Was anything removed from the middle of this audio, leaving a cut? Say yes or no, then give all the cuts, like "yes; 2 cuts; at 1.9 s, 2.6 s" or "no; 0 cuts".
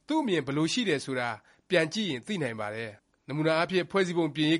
yes; 1 cut; at 3.0 s